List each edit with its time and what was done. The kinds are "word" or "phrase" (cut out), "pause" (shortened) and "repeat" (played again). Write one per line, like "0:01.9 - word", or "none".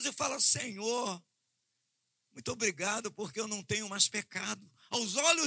none

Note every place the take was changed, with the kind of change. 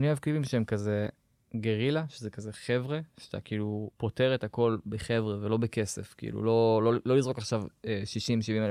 0:03.9 - pause

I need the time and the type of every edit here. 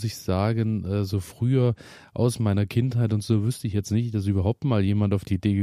none

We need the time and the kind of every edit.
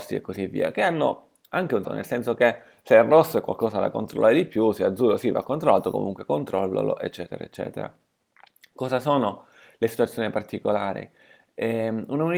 0:01.8 - word

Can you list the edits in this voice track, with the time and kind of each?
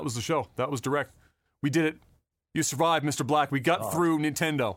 none

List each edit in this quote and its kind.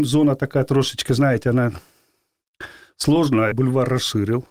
0:03.5 - word

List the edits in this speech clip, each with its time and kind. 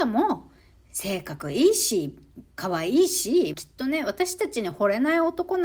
0:02.5 - pause
0:03.5 - phrase

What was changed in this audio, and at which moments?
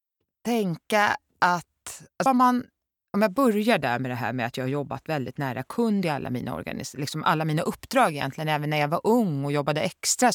0:02.3 - word

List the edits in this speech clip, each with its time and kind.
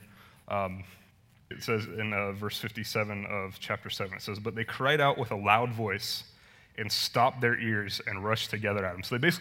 0:01.5 - word

